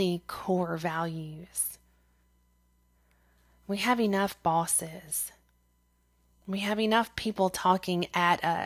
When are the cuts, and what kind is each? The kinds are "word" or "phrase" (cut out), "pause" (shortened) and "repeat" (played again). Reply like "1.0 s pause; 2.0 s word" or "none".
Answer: none